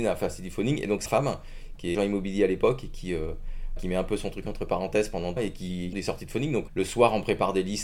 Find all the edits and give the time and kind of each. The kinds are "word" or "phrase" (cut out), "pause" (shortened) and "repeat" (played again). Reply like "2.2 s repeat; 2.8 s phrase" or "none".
1.1 s word; 1.9 s word; 3.8 s word; 5.4 s word; 5.9 s word; 6.7 s word